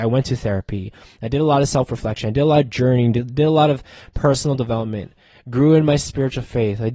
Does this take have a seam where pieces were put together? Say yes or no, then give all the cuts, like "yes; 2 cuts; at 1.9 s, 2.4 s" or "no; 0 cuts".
no; 0 cuts